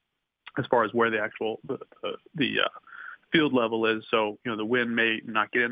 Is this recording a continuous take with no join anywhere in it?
yes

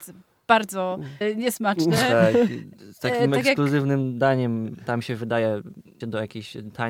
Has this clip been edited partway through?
yes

